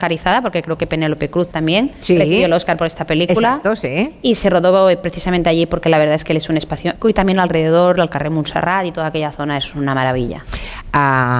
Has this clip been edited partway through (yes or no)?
yes